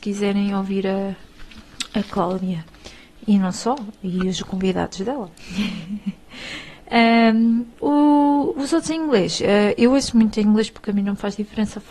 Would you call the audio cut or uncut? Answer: cut